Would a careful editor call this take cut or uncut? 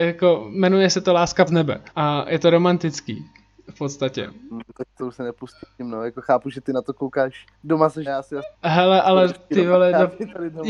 cut